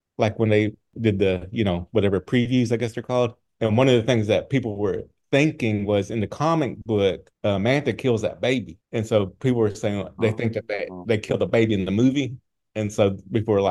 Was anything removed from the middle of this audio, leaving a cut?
no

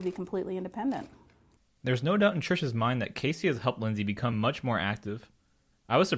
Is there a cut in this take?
no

